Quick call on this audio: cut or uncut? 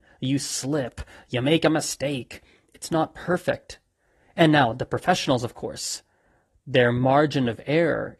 uncut